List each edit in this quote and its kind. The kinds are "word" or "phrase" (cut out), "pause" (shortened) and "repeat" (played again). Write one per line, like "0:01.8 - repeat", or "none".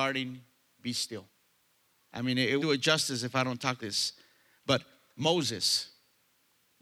0:02.6 - word
0:03.8 - word